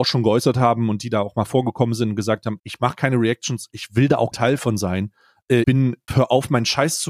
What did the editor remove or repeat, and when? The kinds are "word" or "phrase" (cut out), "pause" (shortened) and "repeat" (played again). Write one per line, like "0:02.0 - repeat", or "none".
0:02.6 - word
0:04.3 - word
0:05.6 - word
0:06.1 - word